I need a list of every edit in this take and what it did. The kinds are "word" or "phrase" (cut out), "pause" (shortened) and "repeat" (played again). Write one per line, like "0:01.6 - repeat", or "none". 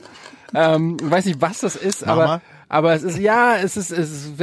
none